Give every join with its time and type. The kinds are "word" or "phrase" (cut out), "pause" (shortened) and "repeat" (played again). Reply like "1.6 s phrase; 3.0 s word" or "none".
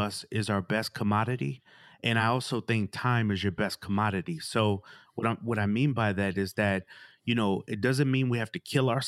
none

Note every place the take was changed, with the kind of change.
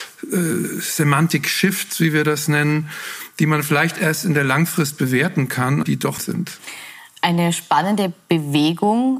5.8 s word; 6.2 s word

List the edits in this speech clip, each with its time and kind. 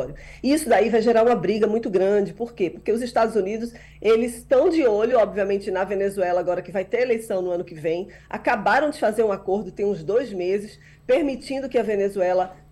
none

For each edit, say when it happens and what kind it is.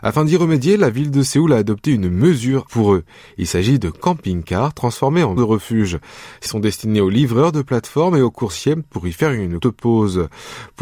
2.7 s word; 5.4 s word; 6.5 s word; 9.6 s word

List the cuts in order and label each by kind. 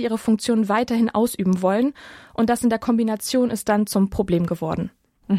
none

